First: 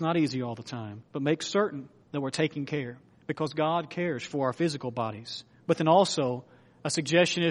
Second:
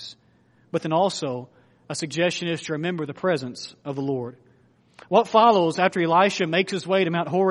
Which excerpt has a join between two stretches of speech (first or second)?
first